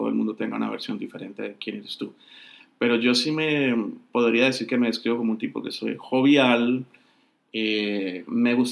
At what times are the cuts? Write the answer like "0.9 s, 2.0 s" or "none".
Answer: none